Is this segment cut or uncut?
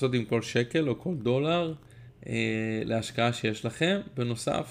uncut